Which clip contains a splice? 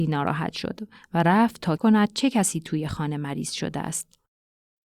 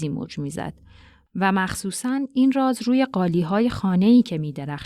first; 1 cut; at 1.8 s

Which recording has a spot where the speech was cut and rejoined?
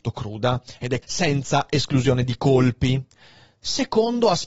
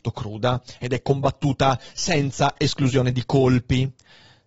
first; 1 cut; at 1.0 s

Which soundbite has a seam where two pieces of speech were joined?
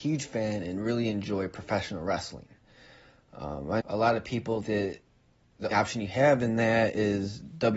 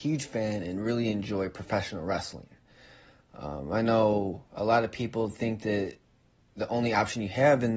first; 3 cuts; at 3.8 s, 4.6 s, 5.7 s

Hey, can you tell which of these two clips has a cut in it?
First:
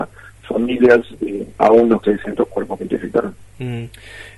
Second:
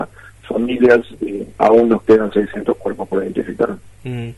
first; 2 cuts; at 2.0 s, 2.8 s

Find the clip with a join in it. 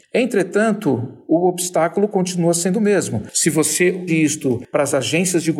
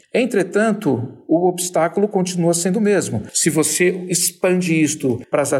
first; 1 cut; at 4.1 s

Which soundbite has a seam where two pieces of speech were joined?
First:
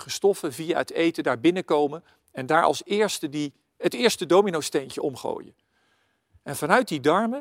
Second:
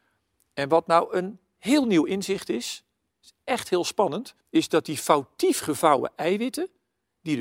second; 1 cut; at 4.4 s

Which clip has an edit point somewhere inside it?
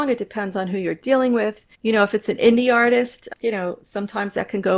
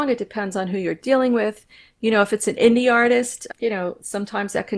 first; 1 cut; at 1.7 s

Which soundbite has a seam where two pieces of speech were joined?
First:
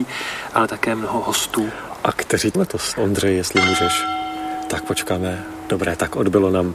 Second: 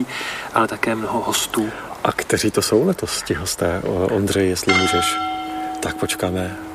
first; 2 cuts; at 2.5 s, 3.0 s

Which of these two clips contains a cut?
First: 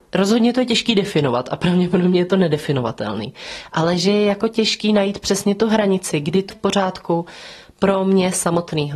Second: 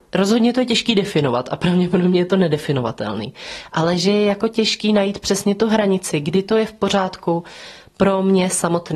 first; 1 cut; at 6.5 s

